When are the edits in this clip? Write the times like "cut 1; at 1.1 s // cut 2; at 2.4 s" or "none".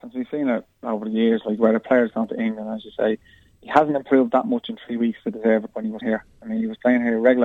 cut 1; at 5.7 s // cut 2; at 6.0 s